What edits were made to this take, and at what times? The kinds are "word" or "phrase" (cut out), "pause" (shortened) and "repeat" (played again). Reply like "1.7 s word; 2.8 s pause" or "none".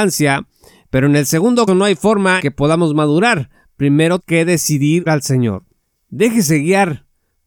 1.7 s word; 2.4 s word; 4.2 s word; 5.1 s word